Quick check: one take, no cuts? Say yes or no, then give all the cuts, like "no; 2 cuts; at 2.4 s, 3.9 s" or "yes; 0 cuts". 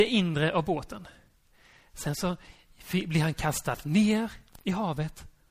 yes; 0 cuts